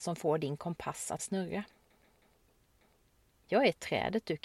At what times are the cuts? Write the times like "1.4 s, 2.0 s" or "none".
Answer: 1.2 s